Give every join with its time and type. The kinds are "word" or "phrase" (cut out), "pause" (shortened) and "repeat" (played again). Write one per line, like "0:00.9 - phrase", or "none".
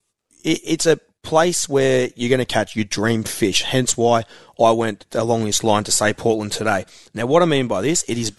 none